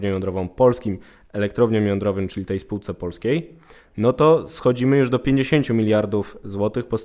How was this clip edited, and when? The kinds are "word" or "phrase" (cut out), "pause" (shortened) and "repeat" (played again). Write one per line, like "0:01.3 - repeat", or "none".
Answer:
none